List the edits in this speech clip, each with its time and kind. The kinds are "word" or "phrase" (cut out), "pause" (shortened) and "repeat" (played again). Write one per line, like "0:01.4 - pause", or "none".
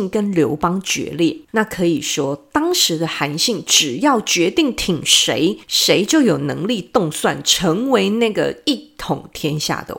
0:01.4 - pause
0:05.6 - pause